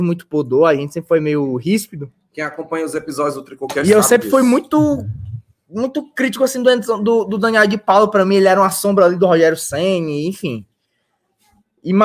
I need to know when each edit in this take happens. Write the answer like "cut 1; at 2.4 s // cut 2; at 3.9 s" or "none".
none